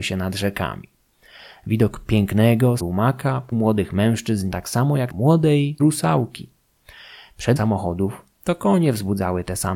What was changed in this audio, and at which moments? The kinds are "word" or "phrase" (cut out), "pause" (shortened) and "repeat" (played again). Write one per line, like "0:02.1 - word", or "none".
0:02.8 - word
0:03.5 - word
0:04.5 - word
0:05.1 - word
0:05.8 - word
0:07.6 - word